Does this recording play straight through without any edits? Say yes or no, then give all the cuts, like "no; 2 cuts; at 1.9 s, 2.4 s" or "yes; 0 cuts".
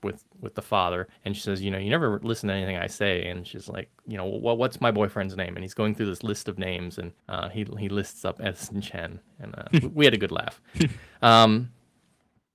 no; 3 cuts; at 1.1 s, 7.2 s, 10.7 s